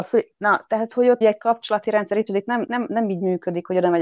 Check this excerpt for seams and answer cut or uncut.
cut